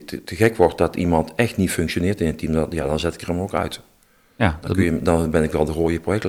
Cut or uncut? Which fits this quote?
uncut